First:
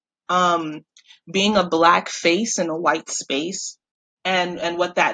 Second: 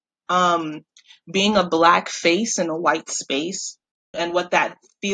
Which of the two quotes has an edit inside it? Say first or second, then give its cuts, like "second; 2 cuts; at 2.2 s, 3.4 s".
second; 1 cut; at 4.1 s